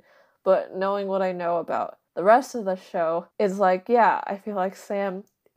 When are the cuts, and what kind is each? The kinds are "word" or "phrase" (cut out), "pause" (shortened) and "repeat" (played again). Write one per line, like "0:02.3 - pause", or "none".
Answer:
0:02.1 - pause
0:03.3 - pause